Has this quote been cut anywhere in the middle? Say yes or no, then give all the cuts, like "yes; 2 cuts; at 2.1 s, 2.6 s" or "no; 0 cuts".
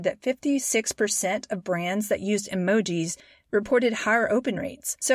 no; 0 cuts